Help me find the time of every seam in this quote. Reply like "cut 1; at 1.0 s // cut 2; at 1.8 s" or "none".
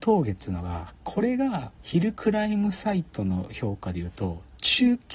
cut 1; at 1.7 s